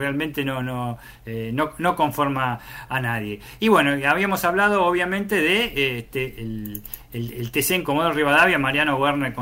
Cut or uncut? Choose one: cut